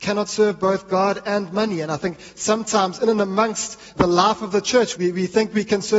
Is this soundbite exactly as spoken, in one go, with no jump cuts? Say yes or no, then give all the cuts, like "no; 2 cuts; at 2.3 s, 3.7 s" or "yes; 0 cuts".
no; 2 cuts; at 3.9 s, 4.9 s